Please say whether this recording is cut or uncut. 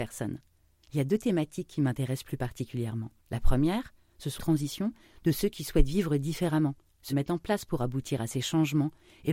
cut